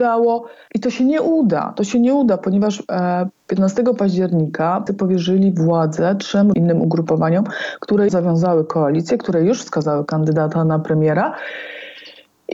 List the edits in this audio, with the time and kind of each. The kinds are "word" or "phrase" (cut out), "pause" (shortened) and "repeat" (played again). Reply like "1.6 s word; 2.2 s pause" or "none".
3.4 s pause; 4.9 s word; 6.5 s word; 8.1 s word

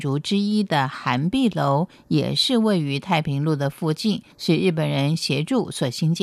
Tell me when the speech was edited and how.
4.3 s pause

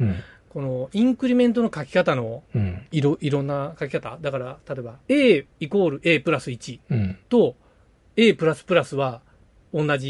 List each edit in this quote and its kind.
2.9 s pause; 5.0 s pause; 7.2 s pause

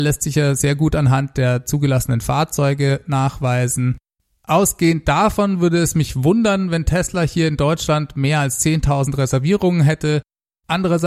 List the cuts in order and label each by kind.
none

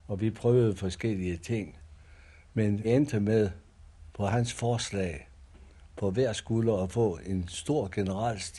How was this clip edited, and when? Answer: 2.8 s word; 5.9 s word

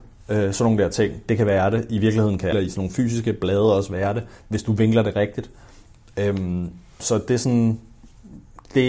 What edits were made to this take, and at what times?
2.5 s word; 7.0 s word

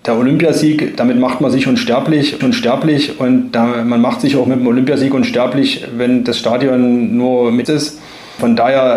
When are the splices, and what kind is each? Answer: 2.4 s repeat; 7.7 s phrase

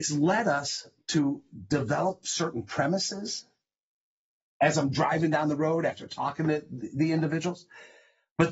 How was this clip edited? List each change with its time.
none

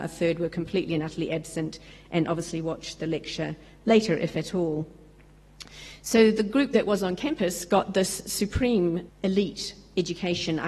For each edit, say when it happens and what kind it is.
9.1 s word

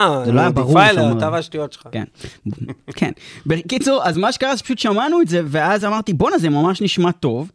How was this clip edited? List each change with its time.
none

